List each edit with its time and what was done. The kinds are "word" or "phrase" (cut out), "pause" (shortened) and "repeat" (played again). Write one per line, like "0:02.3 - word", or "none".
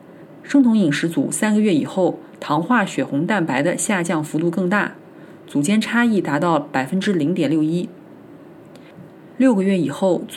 0:09.3 - pause